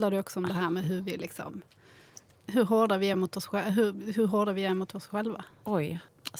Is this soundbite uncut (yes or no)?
yes